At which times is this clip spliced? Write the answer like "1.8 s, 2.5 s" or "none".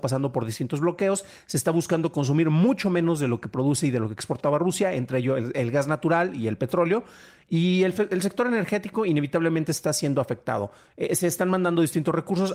none